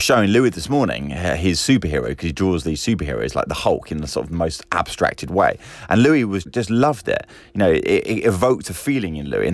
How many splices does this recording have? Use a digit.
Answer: 1